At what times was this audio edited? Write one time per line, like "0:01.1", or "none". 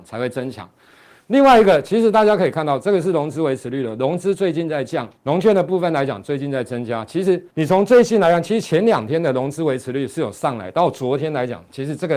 0:05.2
0:07.5